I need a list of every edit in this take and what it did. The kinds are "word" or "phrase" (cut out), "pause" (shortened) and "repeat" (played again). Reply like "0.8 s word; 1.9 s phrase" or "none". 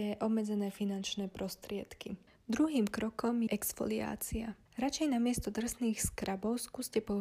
2.3 s pause; 3.5 s word; 4.7 s pause